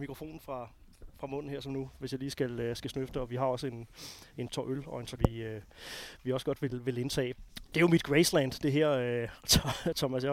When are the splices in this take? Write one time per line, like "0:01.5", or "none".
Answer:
0:04.5
0:05.2
0:07.5